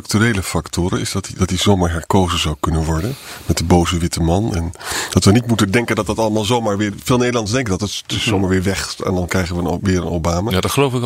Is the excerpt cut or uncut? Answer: uncut